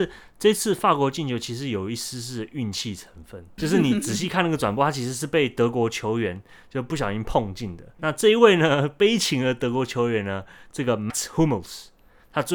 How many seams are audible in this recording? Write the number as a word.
three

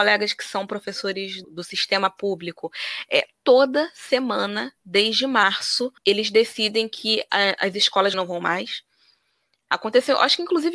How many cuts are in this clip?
three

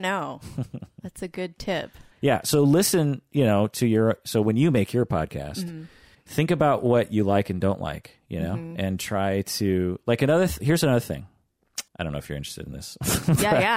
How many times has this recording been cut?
three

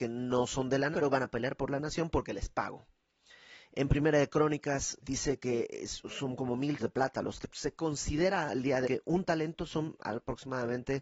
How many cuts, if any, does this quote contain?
five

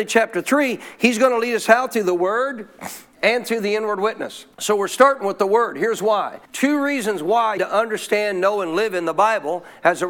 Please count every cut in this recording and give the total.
three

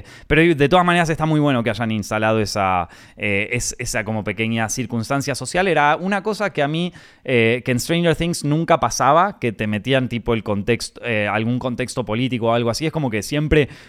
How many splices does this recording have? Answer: zero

